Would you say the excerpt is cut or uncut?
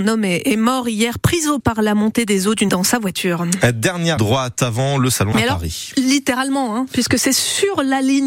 cut